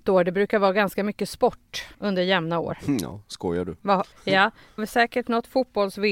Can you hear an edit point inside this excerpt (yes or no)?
yes